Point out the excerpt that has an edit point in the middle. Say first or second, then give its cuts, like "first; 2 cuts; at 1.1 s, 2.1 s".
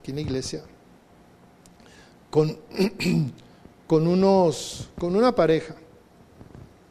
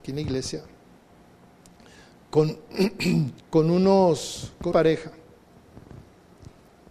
second; 2 cuts; at 3.4 s, 4.7 s